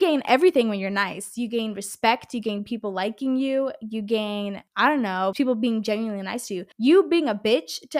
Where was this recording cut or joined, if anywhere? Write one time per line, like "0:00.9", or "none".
0:04.7
0:05.3
0:06.7